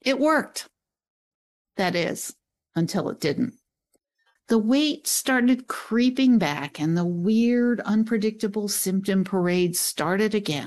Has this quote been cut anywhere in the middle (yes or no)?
no